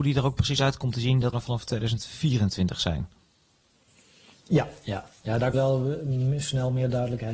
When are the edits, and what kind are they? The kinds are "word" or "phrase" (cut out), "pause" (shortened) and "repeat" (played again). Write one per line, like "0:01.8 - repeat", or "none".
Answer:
0:01.3 - word
0:05.5 - word